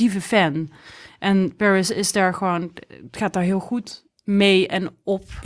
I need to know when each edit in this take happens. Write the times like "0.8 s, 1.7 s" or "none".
none